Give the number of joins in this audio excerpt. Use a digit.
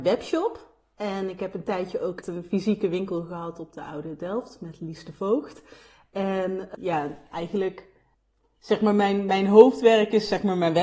2